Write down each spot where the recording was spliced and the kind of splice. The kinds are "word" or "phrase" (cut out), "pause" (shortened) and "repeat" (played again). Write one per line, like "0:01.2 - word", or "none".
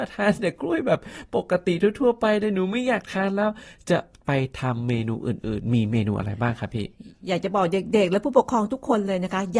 none